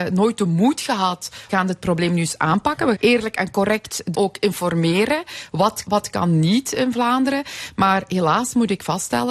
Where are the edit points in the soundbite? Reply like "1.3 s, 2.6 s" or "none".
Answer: 1.5 s, 2.9 s, 4.1 s, 5.9 s